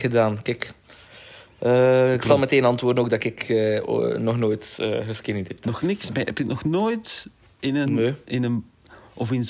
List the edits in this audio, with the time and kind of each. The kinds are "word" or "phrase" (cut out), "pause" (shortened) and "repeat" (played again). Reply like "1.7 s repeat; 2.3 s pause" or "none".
none